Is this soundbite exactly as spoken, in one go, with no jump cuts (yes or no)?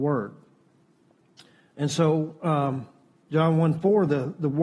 yes